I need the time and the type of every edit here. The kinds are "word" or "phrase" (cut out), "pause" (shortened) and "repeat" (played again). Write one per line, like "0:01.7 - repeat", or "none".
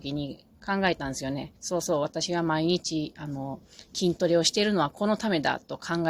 0:01.6 - pause